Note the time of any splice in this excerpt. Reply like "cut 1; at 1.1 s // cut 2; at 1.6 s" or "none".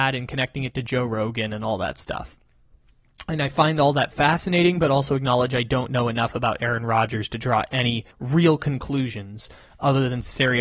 cut 1; at 8.1 s